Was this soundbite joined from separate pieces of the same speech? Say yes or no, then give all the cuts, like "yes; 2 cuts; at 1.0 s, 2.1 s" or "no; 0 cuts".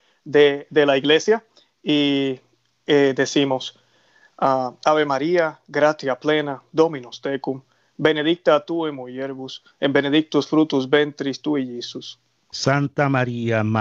no; 0 cuts